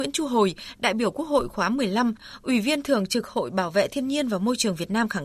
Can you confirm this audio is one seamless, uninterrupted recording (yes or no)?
yes